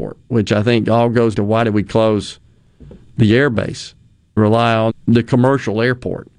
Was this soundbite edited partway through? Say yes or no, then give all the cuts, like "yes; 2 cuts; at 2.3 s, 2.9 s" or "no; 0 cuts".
yes; 3 cuts; at 1.3 s, 4.4 s, 4.9 s